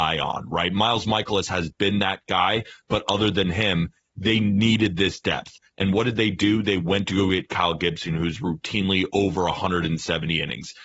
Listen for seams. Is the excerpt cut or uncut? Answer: uncut